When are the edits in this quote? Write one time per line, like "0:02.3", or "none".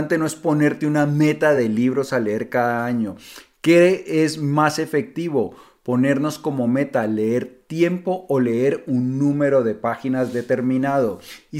none